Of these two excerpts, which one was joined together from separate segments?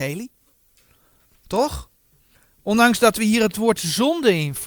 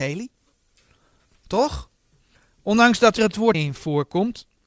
second; 2 cuts; at 3.2 s, 3.5 s

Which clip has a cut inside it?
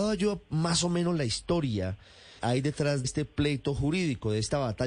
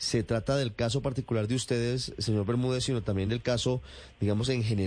first; 2 cuts; at 2.4 s, 3.0 s

